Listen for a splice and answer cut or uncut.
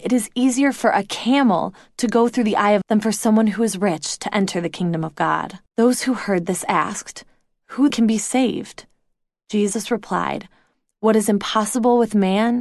cut